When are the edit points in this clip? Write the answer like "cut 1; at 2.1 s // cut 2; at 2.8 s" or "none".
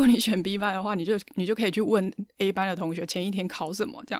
none